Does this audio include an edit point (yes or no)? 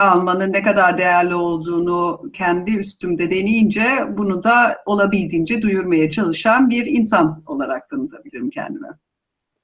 no